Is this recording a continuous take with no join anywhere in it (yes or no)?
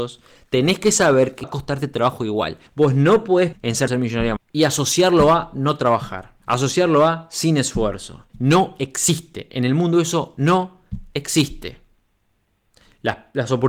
no